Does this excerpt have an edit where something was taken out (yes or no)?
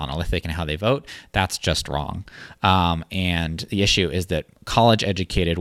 yes